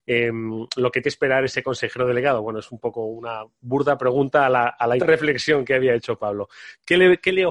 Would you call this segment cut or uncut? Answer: cut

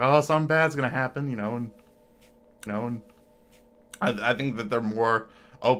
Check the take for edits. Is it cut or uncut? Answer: cut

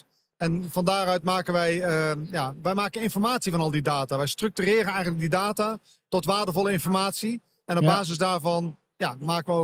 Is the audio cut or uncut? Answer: uncut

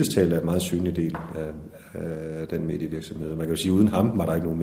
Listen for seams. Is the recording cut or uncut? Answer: uncut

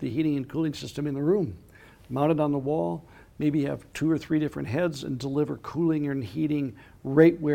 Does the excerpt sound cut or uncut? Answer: uncut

